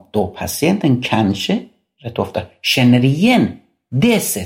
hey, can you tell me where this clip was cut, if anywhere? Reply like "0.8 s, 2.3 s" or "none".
none